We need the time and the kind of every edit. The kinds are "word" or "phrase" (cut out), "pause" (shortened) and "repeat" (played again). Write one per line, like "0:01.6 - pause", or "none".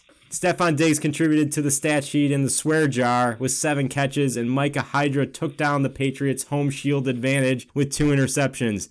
none